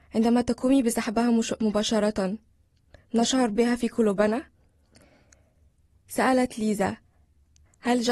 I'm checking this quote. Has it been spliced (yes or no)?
no